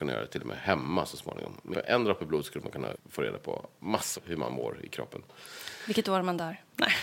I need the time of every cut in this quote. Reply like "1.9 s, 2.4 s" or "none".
1.7 s, 2.9 s, 4.1 s